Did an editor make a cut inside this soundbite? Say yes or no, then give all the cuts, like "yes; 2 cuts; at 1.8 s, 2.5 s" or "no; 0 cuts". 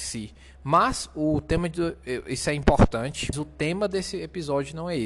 yes; 1 cut; at 3.3 s